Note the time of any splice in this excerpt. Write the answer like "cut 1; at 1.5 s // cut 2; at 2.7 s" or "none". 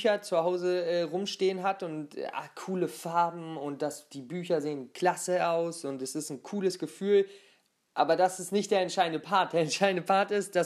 none